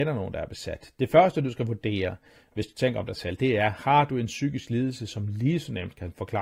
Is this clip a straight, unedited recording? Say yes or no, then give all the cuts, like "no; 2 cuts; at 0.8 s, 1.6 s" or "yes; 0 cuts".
yes; 0 cuts